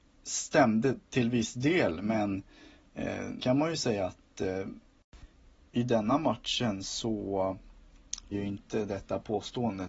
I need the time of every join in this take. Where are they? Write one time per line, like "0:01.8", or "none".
0:03.4
0:08.3

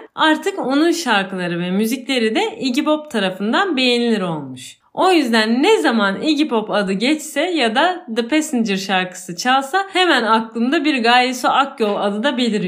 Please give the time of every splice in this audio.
none

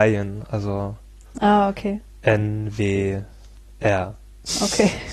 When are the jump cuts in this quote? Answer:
none

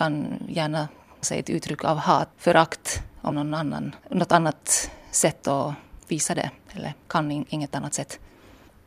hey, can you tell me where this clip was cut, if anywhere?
0:01.2
0:02.3
0:03.3
0:04.0
0:06.0

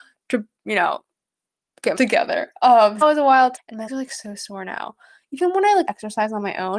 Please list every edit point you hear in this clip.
0:02.0
0:03.0
0:03.6
0:03.9
0:05.9

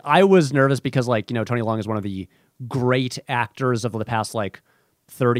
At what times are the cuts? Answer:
none

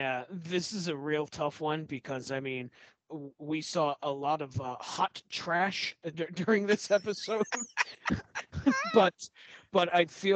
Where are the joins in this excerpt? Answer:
none

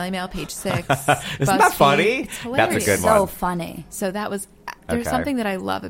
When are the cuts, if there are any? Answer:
0:04.8

